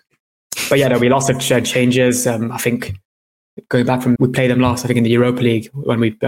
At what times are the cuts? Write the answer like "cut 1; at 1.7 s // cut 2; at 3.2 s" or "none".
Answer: cut 1; at 4.2 s